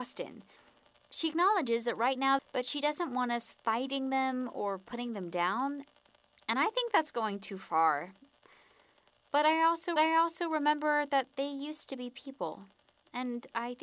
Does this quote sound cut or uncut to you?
cut